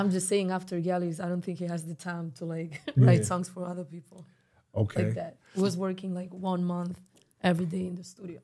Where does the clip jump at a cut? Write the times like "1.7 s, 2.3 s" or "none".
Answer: none

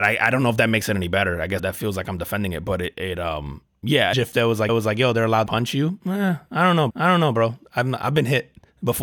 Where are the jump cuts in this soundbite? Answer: 1.6 s, 2.9 s, 4.1 s, 4.7 s, 5.5 s, 6.9 s

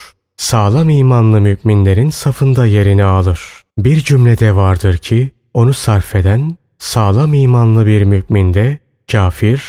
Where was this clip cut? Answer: 3.7 s

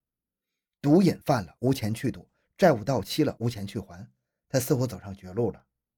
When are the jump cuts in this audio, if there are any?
none

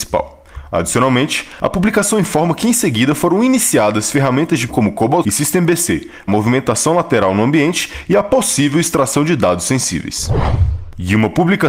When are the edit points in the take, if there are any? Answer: 4.7 s, 5.2 s, 6.3 s

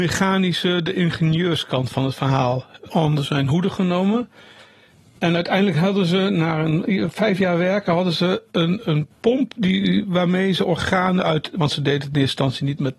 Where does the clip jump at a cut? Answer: 2.9 s

